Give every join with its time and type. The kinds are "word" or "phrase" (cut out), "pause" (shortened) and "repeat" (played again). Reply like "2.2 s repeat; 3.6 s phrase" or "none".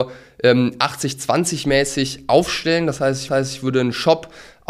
3.3 s repeat